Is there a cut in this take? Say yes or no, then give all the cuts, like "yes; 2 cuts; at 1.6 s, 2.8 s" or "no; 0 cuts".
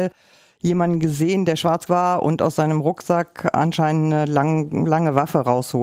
yes; 1 cut; at 1.9 s